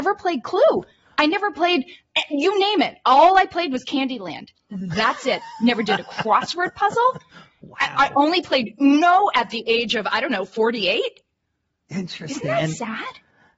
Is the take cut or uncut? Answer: uncut